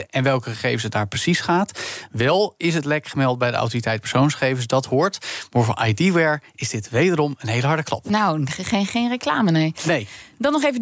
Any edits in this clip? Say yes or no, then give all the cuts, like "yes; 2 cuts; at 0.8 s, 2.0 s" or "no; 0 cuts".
no; 0 cuts